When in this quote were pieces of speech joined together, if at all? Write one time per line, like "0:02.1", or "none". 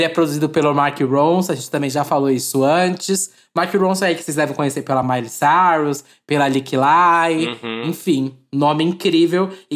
none